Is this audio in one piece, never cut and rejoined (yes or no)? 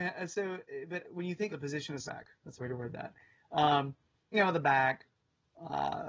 no